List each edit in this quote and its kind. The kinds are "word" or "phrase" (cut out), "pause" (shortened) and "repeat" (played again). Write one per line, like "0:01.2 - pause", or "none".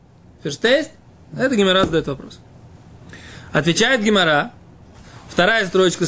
none

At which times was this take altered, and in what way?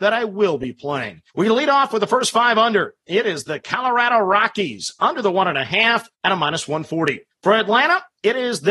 0:01.3 - pause
0:06.1 - pause
0:07.3 - pause

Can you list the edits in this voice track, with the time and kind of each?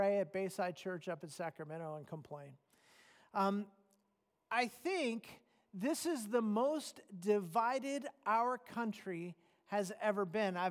none

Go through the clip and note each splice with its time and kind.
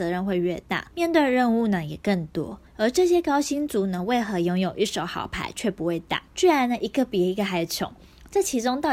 0:00.9 - pause
0:02.7 - pause
0:06.3 - pause

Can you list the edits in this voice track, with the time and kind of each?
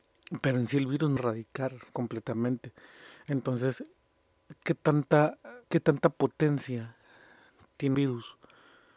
0:01.2 - phrase
0:01.9 - pause
0:05.6 - pause
0:07.9 - word

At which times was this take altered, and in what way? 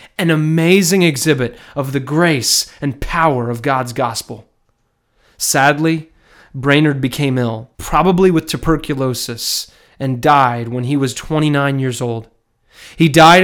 0:07.7 - pause
0:11.1 - word

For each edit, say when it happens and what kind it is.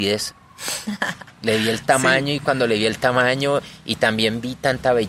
none

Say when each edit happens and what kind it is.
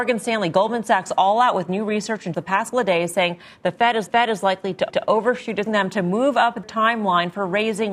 0:02.3 - word
0:02.7 - word
0:04.1 - repeat
0:04.9 - repeat
0:05.7 - phrase
0:06.6 - word

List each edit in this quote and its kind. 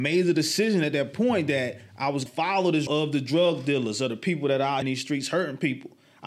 0:02.3 - word
0:02.9 - word
0:04.8 - word

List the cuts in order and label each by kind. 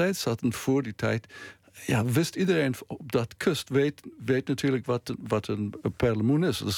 none

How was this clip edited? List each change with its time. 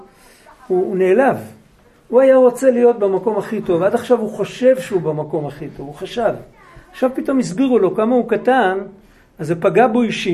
none

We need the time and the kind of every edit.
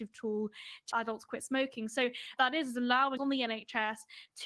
0:00.9 - word
0:02.4 - phrase
0:03.2 - word

